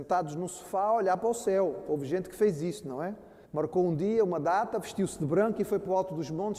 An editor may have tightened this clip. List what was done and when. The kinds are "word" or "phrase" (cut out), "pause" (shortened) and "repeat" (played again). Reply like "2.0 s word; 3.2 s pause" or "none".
3.4 s pause

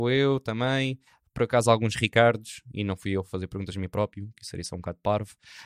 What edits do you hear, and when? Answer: none

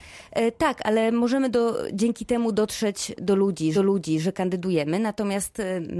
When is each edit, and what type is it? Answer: 3.7 s repeat

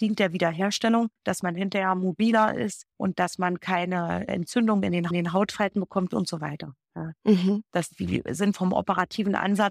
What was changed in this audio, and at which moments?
1.2 s pause; 2.9 s pause; 4.3 s word; 5.1 s repeat; 8.5 s word

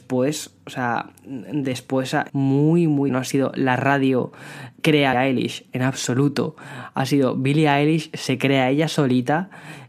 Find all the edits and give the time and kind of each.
2.3 s phrase; 3.1 s word; 4.8 s word; 5.1 s phrase

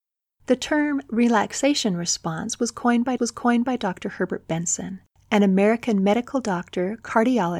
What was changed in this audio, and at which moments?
3.2 s repeat

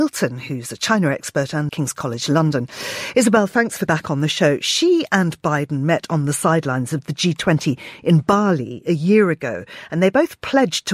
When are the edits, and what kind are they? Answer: 1.7 s phrase; 3.9 s word

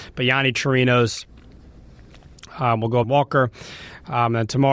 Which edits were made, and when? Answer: 3.0 s phrase

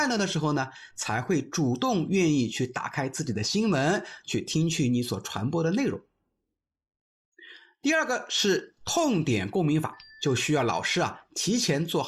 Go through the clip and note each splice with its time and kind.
10.1 s pause

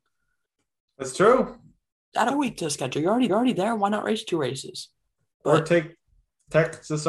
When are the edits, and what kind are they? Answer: 2.3 s phrase; 3.3 s repeat

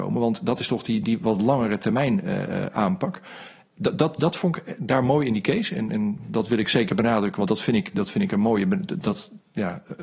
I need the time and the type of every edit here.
none

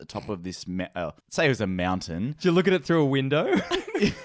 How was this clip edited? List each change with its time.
1.2 s pause

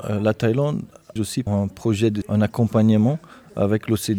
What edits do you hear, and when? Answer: 1.2 s word; 1.5 s word; 2.2 s word

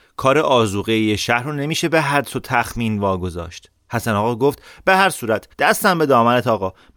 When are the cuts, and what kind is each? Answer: 5.5 s pause

